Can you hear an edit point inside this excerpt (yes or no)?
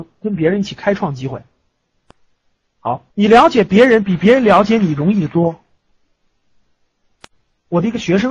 yes